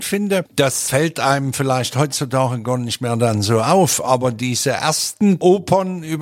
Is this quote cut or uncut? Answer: uncut